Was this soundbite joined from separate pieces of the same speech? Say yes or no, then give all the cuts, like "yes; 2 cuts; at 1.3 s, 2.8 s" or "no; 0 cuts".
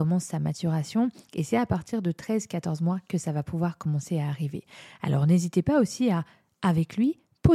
no; 0 cuts